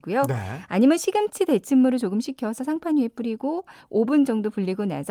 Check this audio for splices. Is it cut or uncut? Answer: uncut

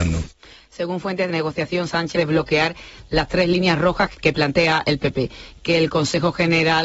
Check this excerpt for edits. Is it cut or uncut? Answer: cut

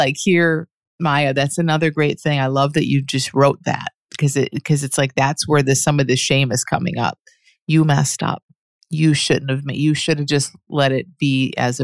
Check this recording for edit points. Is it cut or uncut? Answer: uncut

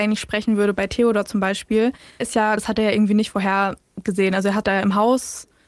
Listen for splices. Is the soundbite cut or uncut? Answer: cut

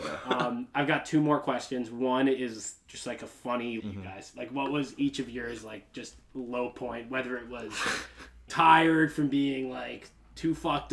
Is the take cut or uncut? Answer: cut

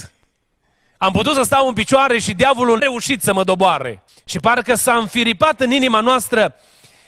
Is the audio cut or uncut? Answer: cut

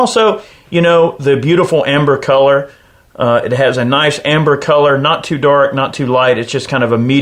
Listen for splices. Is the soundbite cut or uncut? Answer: uncut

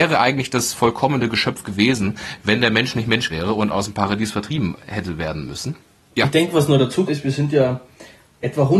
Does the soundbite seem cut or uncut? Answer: cut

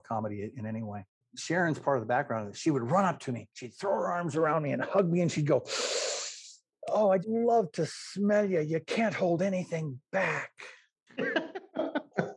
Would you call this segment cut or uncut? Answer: cut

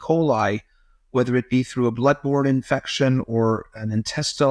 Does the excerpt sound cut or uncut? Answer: uncut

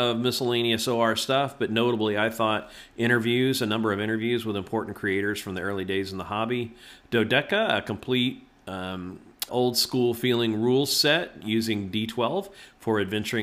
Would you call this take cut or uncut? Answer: cut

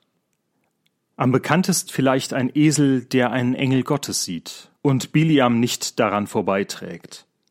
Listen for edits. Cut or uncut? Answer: cut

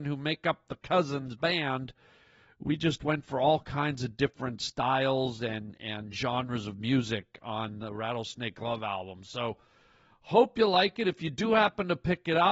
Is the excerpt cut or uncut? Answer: uncut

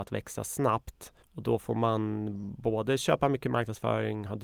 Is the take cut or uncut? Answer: cut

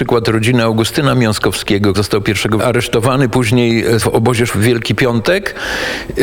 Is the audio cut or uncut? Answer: cut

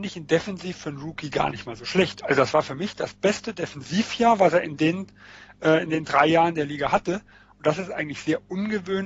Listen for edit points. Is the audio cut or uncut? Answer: uncut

